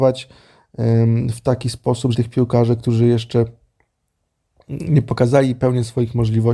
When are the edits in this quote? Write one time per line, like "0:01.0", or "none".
0:02.1

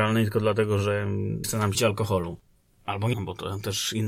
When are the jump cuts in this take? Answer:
0:01.4
0:01.7
0:03.1

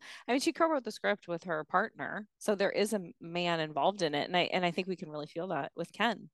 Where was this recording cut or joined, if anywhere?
0:02.3

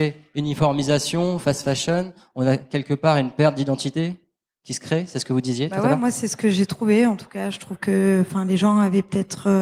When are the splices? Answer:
none

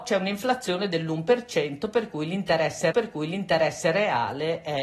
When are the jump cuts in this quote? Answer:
0:02.9

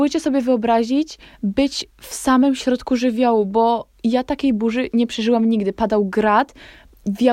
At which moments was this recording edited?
none

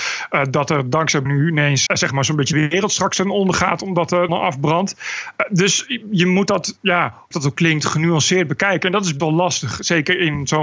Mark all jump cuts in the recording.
0:01.3
0:01.9
0:02.5
0:04.3
0:07.3
0:09.2

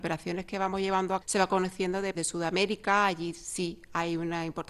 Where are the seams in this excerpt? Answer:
0:01.2
0:02.1

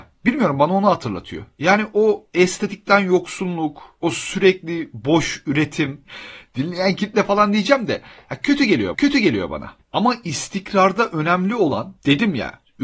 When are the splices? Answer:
0:06.0
0:08.9

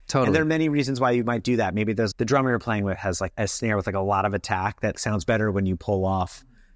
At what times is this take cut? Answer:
0:02.1
0:03.3
0:04.9

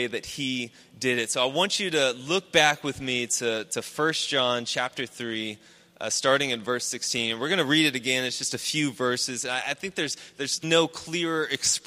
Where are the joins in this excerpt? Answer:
0:10.6

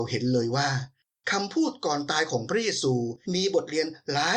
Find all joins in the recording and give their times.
0:03.2

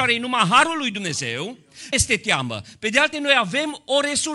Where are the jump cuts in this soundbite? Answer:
0:01.9
0:03.1

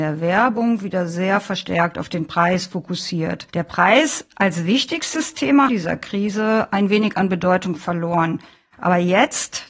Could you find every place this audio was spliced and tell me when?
0:03.5
0:05.7

